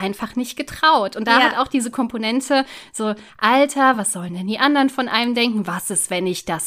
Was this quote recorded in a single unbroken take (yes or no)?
yes